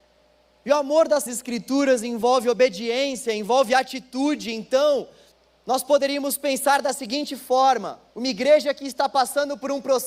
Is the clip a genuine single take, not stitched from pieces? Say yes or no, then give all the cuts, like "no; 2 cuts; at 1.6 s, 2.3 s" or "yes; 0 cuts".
no; 3 cuts; at 1.3 s, 5.3 s, 8.1 s